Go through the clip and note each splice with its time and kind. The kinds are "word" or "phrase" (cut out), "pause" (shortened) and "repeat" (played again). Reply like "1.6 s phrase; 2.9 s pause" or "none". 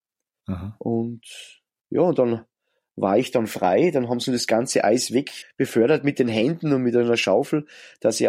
5.4 s word